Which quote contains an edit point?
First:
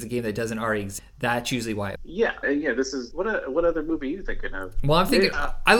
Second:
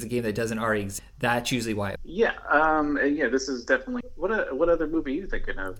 first; 2 cuts; at 2.4 s, 3.1 s

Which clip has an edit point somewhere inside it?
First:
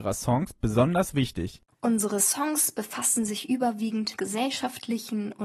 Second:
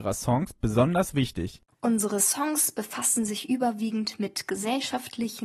first; 1 cut; at 4.2 s

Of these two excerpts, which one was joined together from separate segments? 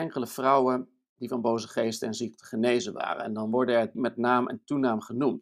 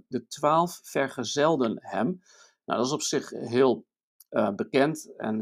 first; 1 cut; at 3.9 s

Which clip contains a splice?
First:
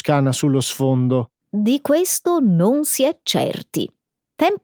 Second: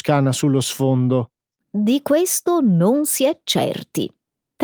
first; 1 cut; at 1.4 s

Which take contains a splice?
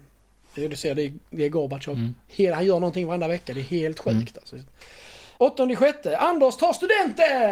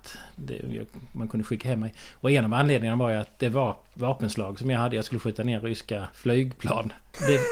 second; 1 cut; at 6.1 s

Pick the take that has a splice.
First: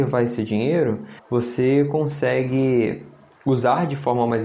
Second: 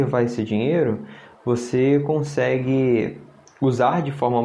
first; 1 cut; at 1.2 s

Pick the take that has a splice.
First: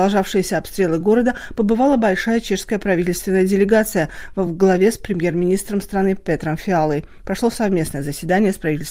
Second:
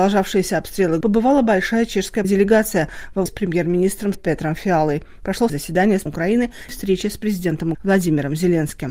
second; 8 cuts; at 1.0 s, 2.2 s, 3.3 s, 4.1 s, 5.5 s, 6.1 s, 6.7 s, 7.7 s

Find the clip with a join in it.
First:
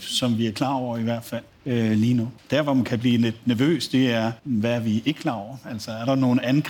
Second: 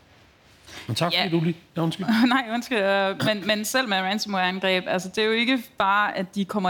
first; 3 cuts; at 1.5 s, 2.4 s, 4.4 s

